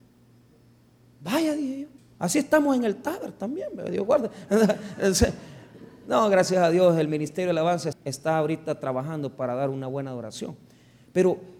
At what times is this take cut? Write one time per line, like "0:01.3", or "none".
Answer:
0:02.0
0:07.9